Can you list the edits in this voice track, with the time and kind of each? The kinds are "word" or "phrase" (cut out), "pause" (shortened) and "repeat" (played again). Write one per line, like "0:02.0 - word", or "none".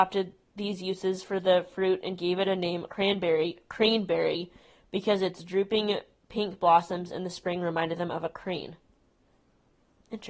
none